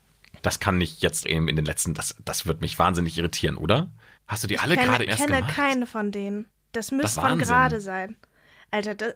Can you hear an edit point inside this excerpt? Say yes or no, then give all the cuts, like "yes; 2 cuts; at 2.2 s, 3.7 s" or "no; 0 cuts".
yes; 4 cuts; at 1.2 s, 4.2 s, 5.1 s, 7.2 s